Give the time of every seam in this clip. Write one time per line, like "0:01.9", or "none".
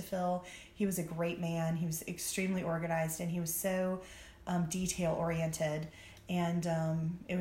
none